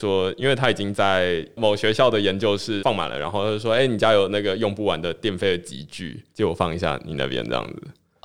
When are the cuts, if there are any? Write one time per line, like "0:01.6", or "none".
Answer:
0:06.3